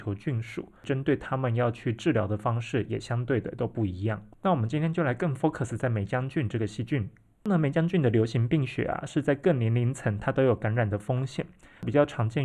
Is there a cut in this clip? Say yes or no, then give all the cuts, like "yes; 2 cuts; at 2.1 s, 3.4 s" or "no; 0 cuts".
no; 0 cuts